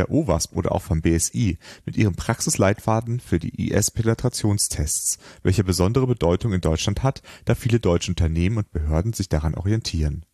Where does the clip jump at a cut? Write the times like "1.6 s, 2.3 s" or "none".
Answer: none